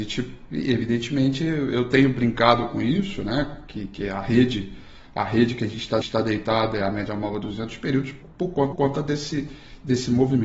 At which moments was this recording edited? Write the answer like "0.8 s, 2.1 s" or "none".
6.0 s, 8.2 s, 8.7 s